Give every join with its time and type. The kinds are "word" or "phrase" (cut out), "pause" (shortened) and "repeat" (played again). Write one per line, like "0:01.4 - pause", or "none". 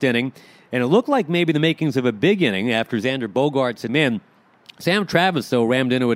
0:03.9 - phrase